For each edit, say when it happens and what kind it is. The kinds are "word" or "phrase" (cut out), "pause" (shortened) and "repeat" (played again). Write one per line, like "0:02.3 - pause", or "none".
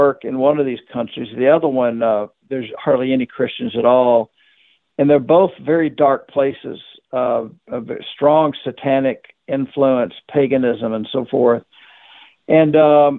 none